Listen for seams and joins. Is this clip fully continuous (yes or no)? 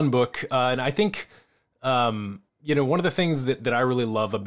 no